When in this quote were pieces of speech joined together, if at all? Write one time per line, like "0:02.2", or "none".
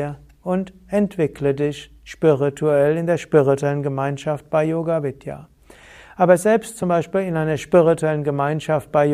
none